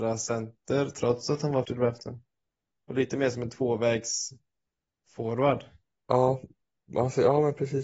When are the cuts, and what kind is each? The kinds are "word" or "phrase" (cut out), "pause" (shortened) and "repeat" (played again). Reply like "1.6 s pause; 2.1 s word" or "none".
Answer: 1.6 s word